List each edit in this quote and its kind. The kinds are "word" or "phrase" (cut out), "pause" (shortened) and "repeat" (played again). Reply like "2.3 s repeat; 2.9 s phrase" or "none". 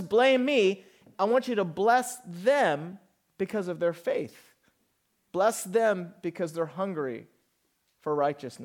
1.1 s word

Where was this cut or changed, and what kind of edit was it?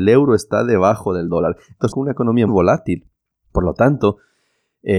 1.9 s word; 2.5 s word

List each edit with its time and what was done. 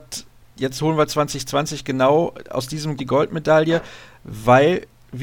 3.0 s phrase

